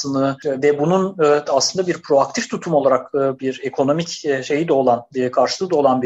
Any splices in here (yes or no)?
yes